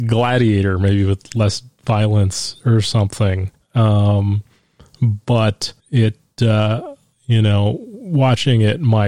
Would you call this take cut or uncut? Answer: cut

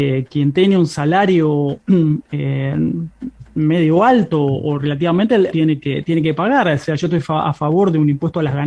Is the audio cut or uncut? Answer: cut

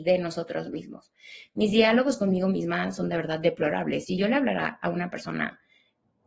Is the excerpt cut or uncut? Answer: uncut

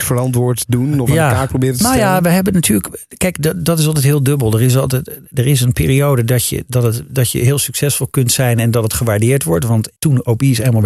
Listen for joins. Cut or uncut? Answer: cut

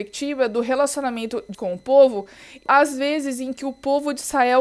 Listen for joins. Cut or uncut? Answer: cut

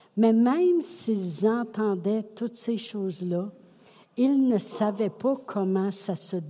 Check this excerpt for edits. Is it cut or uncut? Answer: uncut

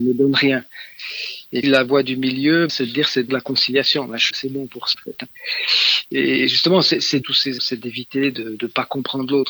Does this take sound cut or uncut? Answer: cut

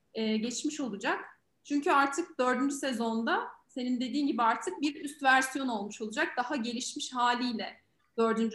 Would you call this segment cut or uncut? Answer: uncut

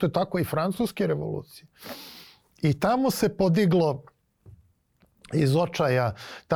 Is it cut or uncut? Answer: uncut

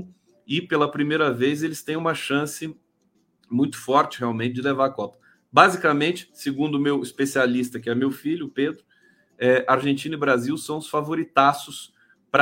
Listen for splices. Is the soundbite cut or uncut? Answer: uncut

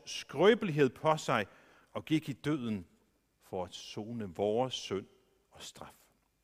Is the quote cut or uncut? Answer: uncut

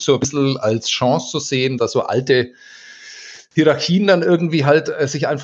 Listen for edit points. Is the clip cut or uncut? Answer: cut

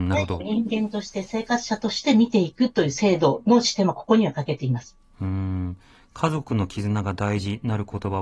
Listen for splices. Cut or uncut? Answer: uncut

